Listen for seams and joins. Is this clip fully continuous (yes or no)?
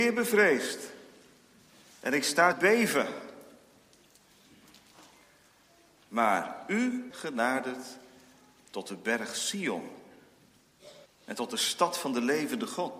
no